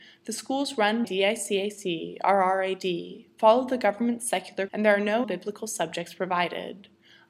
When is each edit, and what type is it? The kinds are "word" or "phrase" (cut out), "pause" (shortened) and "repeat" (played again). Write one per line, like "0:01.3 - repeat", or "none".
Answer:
0:01.0 - word
0:04.7 - word
0:05.2 - word